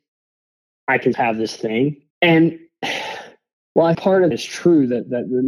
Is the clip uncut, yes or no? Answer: no